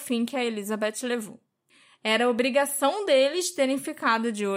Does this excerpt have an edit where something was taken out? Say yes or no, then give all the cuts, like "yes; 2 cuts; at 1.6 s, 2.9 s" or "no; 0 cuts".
no; 0 cuts